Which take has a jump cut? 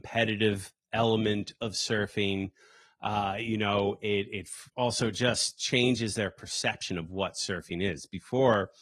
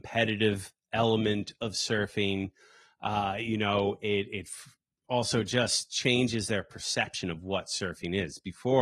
first; 1 cut; at 4.7 s

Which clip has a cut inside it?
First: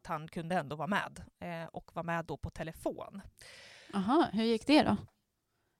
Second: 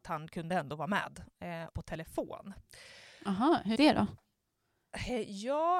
second; 2 cuts; at 1.7 s, 3.8 s

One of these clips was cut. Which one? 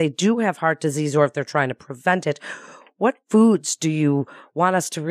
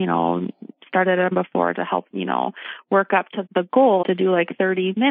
second; 4 cuts; at 1.3 s, 2.1 s, 3.5 s, 4.0 s

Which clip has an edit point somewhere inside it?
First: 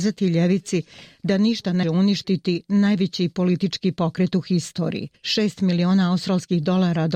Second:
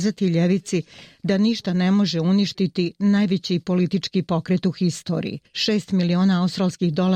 first; 1 cut; at 1.8 s

